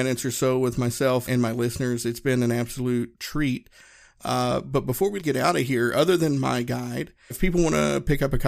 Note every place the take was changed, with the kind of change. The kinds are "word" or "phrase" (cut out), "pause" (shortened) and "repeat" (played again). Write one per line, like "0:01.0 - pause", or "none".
0:01.3 - word
0:05.2 - word
0:07.3 - word